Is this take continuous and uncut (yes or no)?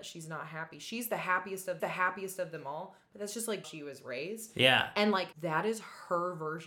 no